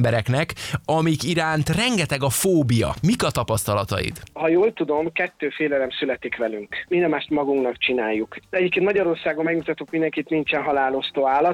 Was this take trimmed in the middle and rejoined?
no; 0 cuts

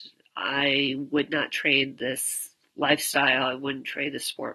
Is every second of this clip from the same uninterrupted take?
yes; 0 cuts

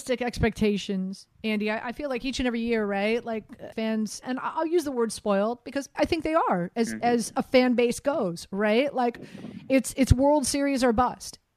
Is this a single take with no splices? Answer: no; 4 cuts; at 3.7 s, 4.2 s, 5.9 s, 9.9 s

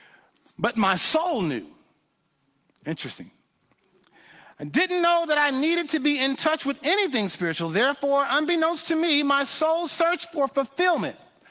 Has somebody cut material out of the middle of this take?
no; 0 cuts

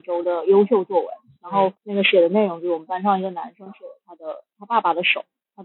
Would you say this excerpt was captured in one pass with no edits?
no; 1 cut; at 1.8 s

